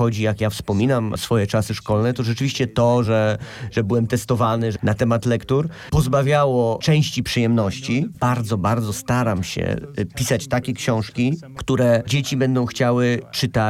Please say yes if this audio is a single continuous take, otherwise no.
yes